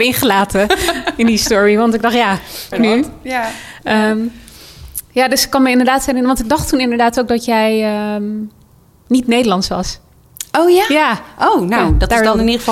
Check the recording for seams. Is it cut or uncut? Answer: cut